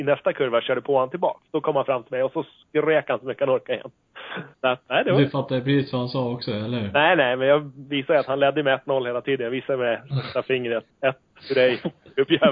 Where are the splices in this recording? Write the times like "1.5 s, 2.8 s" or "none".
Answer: 4.5 s, 10.9 s